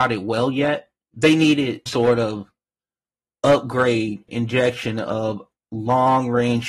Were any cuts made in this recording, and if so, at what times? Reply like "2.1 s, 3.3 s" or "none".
1.0 s, 1.9 s, 4.3 s